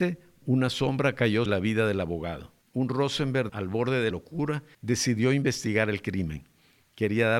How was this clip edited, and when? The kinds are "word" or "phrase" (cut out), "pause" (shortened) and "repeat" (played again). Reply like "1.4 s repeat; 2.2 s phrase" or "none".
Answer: 1.5 s word; 2.6 s pause; 3.5 s word; 4.1 s word; 4.7 s pause